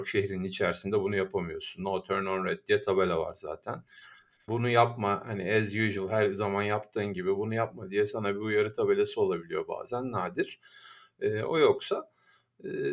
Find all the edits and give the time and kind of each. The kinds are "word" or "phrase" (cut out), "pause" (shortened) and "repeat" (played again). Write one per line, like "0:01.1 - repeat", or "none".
none